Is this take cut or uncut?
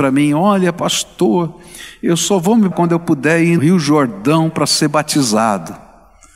cut